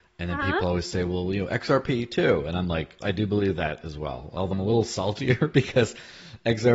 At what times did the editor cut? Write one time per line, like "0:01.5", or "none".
0:03.0
0:04.5